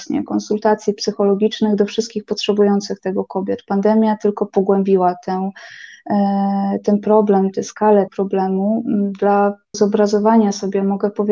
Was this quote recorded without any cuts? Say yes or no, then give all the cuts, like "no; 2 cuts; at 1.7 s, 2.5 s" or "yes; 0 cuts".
no; 2 cuts; at 8.1 s, 9.7 s